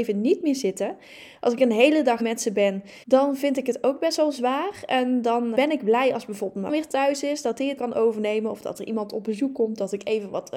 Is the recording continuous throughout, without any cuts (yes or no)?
no